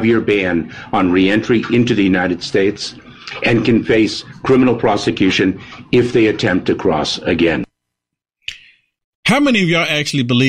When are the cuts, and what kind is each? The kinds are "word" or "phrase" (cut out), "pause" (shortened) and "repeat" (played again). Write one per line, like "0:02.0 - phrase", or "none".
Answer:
none